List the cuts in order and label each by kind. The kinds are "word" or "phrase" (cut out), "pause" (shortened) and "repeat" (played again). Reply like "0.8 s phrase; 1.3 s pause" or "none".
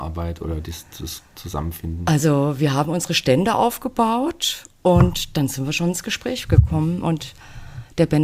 none